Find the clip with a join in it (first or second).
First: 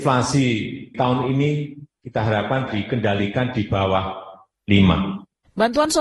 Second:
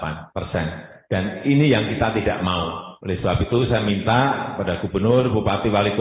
first